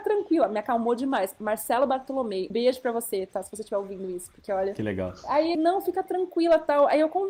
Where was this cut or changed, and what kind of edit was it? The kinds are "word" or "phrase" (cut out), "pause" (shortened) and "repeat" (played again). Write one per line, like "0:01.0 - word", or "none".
0:02.5 - word
0:05.5 - word